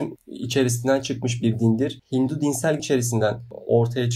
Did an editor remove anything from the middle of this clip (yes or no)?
yes